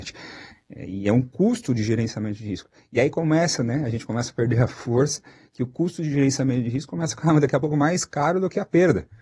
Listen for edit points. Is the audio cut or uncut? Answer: uncut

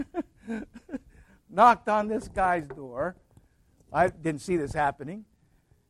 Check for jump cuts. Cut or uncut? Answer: uncut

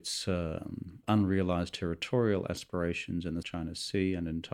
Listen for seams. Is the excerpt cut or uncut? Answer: cut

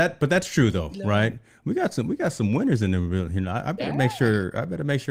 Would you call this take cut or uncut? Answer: uncut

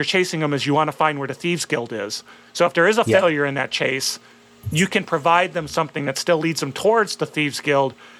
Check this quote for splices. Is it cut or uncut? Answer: uncut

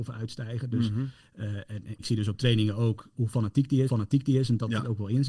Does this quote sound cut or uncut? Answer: cut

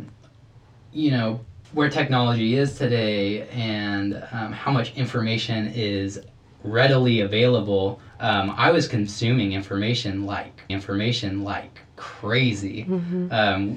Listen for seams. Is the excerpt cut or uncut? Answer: cut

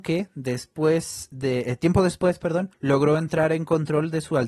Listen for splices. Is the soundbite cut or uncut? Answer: cut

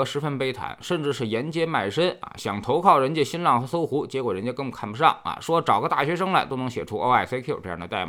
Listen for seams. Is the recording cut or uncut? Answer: uncut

